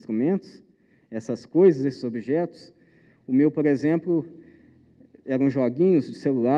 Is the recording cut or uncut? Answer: uncut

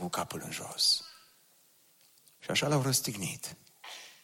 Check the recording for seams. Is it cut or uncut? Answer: uncut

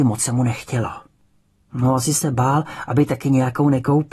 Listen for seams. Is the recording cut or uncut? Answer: uncut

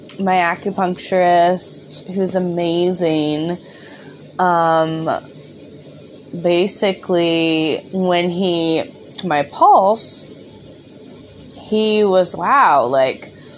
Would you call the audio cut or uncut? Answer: cut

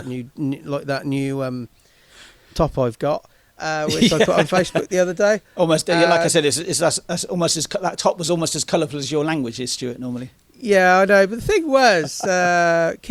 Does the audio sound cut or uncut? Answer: uncut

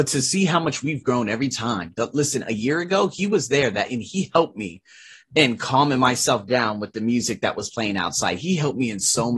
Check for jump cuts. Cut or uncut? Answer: uncut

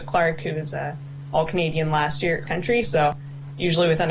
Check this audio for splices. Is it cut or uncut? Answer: cut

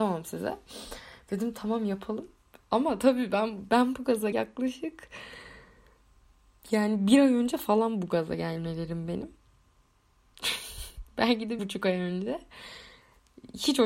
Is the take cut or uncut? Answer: cut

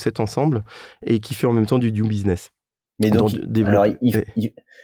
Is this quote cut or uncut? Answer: uncut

